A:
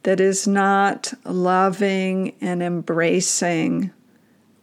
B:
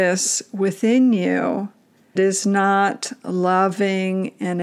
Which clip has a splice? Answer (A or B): B